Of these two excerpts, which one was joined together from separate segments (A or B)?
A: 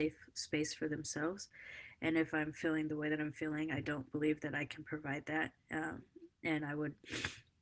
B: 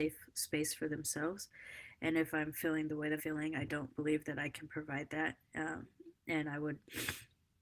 B